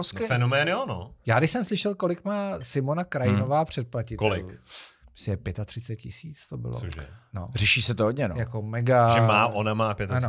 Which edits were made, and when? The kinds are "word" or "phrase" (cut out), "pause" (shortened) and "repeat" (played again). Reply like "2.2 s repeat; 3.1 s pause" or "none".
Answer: none